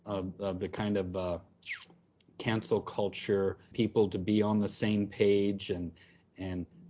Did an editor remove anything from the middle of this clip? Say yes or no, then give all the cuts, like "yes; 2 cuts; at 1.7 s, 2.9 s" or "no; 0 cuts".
yes; 1 cut; at 3.7 s